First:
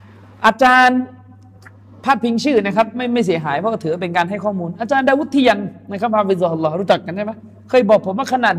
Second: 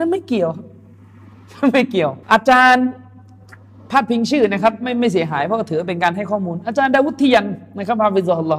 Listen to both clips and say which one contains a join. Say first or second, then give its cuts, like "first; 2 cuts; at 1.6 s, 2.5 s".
second; 1 cut; at 2.2 s